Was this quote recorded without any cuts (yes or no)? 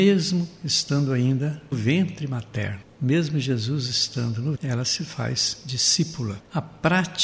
no